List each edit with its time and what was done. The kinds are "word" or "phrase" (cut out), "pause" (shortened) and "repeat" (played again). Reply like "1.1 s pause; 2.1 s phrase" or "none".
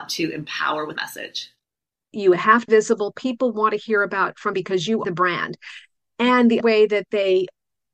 1.0 s word; 2.7 s word; 4.5 s word; 5.0 s word; 6.6 s word